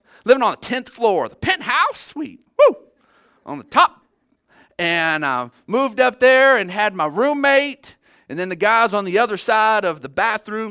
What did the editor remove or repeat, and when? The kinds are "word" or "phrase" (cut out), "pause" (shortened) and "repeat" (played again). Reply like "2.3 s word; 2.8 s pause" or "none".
none

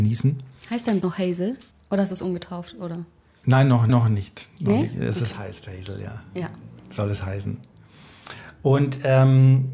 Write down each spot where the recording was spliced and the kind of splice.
1.0 s word; 1.7 s pause; 3.9 s repeat

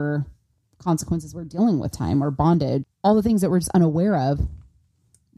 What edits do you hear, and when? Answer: 1.9 s phrase; 2.8 s word

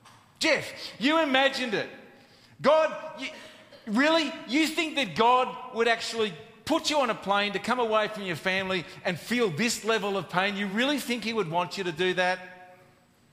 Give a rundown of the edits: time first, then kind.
none

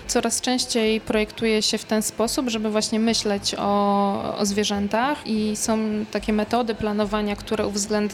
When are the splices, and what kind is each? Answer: none

